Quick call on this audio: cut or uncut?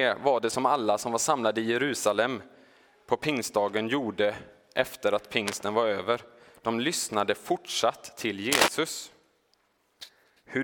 uncut